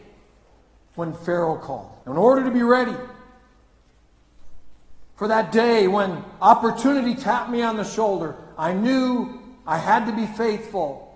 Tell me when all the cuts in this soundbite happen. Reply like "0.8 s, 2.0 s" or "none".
2.0 s, 5.1 s